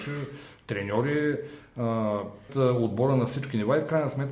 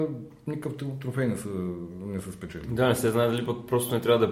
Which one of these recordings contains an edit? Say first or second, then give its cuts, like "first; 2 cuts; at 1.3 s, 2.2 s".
first; 1 cut; at 2.5 s